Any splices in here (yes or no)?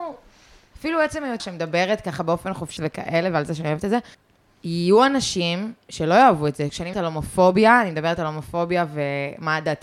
yes